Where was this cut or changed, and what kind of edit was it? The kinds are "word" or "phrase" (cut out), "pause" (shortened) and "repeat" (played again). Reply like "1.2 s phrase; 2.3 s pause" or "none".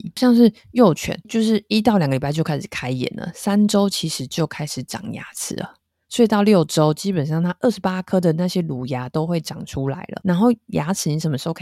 1.2 s word